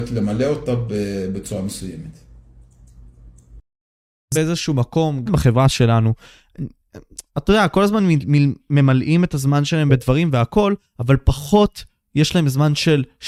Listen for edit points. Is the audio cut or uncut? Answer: cut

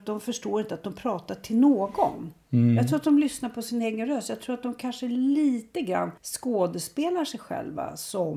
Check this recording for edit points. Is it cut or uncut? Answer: cut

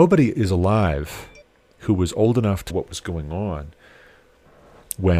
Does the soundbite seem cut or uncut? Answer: cut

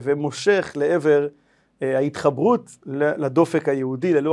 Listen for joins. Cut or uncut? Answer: uncut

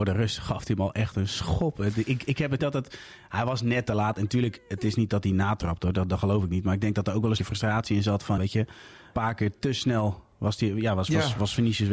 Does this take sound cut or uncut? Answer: cut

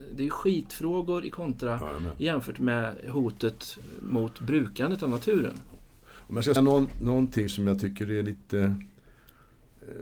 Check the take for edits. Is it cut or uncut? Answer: cut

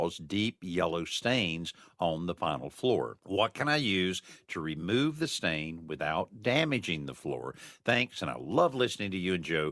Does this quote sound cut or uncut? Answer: uncut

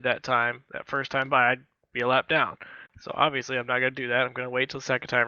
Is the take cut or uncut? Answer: uncut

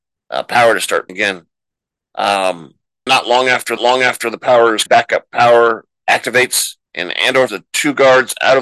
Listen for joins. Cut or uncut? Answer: cut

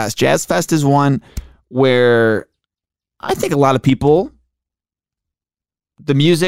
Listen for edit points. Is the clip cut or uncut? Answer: uncut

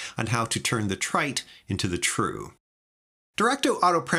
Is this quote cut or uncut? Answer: uncut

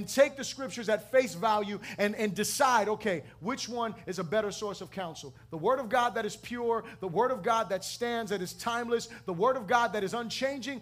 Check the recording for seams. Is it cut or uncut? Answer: uncut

